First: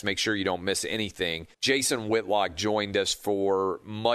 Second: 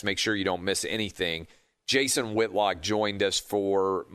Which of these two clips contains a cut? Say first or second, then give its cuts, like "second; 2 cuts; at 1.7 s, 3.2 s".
first; 1 cut; at 1.5 s